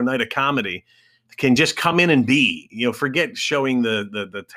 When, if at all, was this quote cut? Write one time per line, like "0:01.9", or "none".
none